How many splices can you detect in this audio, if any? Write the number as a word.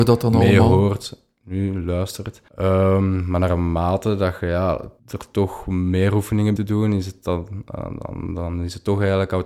three